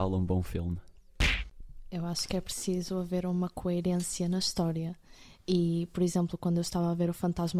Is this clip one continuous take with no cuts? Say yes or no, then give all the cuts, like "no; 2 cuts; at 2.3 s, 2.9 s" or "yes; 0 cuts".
yes; 0 cuts